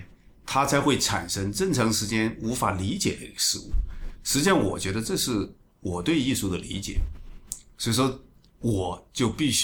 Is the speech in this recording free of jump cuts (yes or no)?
yes